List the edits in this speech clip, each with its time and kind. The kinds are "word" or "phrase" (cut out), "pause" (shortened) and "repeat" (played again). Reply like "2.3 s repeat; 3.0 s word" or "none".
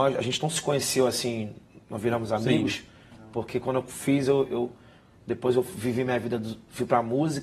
none